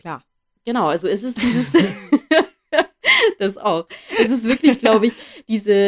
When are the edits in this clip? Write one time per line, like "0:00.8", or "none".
0:01.4